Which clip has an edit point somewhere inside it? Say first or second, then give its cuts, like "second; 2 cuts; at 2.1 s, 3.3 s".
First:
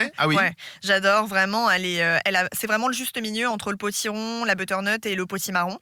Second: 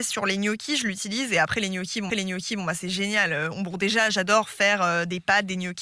second; 1 cut; at 2.1 s